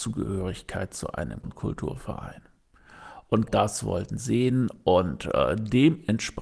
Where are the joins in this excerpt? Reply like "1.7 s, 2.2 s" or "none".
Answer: 1.4 s, 3.5 s, 4.2 s